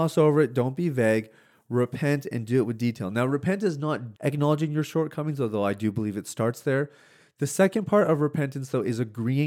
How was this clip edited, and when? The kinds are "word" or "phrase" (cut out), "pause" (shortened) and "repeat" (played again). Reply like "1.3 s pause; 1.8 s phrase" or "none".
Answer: 4.2 s word